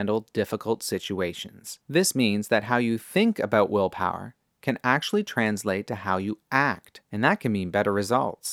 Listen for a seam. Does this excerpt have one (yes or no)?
yes